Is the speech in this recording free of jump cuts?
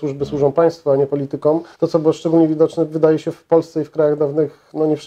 no; 1 cut; at 1.7 s

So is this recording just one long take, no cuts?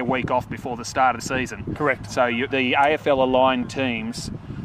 no; 2 cuts; at 1.2 s, 2.5 s

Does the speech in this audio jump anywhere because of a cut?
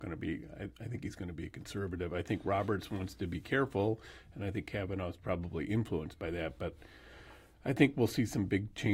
no; 0 cuts

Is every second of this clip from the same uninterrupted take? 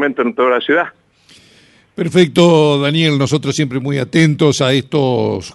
yes; 0 cuts

